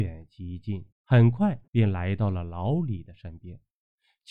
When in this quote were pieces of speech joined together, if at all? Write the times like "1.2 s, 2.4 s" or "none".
0.9 s, 1.7 s